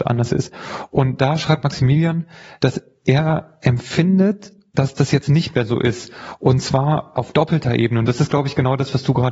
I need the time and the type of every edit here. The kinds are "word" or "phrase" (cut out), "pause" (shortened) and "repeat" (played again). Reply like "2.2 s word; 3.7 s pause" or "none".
none